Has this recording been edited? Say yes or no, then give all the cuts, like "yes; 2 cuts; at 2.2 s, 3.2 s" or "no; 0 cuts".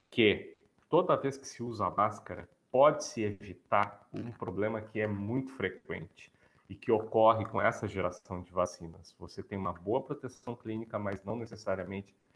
no; 0 cuts